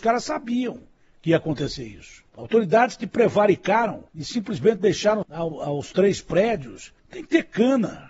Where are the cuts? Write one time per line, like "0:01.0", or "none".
0:02.3
0:04.1
0:05.2
0:07.0